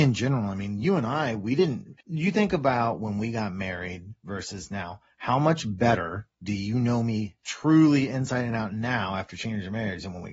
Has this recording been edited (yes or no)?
yes